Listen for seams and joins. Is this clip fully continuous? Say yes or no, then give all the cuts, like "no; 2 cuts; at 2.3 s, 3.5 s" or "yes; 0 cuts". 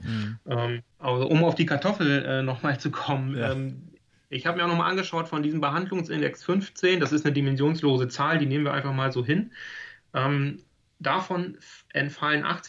no; 1 cut; at 1.3 s